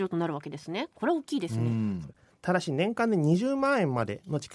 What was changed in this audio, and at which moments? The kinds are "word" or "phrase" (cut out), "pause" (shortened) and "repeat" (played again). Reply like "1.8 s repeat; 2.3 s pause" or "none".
none